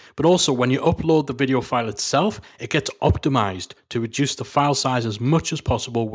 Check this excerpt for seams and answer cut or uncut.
uncut